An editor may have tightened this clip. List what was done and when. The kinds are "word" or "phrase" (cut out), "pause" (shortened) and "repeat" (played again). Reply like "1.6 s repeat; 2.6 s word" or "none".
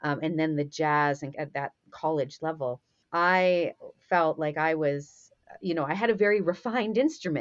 1.3 s word; 3.0 s pause